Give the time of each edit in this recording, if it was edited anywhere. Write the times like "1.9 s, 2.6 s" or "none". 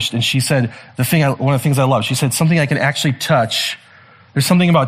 none